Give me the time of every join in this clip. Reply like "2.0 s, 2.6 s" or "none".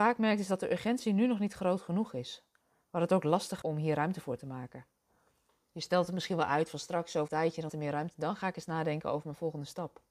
3.6 s, 7.3 s, 7.7 s